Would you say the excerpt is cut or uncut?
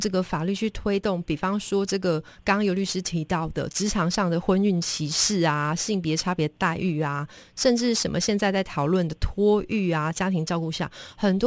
uncut